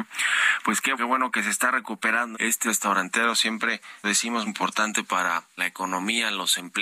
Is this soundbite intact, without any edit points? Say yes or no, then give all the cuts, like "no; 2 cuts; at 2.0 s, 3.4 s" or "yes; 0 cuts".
no; 6 cuts; at 0.9 s, 2.3 s, 2.7 s, 4.0 s, 4.5 s, 5.6 s